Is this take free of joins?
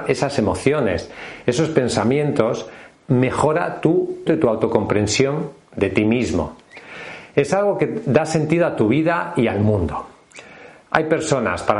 no; 2 cuts; at 2.9 s, 4.3 s

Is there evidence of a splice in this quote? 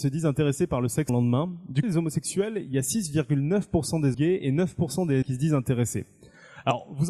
yes; 4 cuts; at 1.1 s, 1.8 s, 4.1 s, 5.2 s

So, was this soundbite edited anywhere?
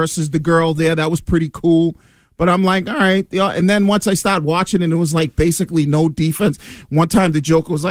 no; 0 cuts

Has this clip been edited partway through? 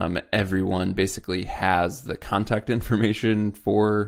no; 0 cuts

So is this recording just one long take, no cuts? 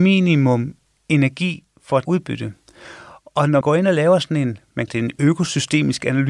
no; 3 cuts; at 2.0 s, 3.6 s, 4.9 s

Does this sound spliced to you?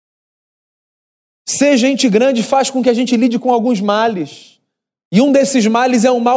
no; 0 cuts

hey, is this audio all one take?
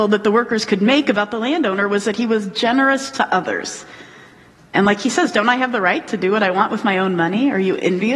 yes; 0 cuts

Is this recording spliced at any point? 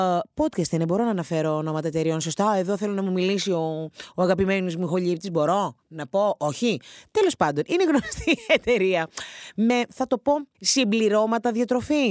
yes; 1 cut; at 10.5 s

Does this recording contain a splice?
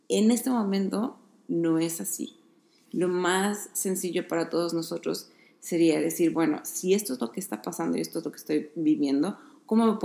no; 0 cuts

